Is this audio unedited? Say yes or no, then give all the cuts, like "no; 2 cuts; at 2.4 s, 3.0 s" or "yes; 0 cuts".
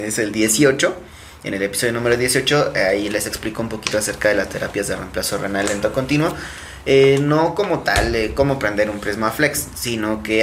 yes; 0 cuts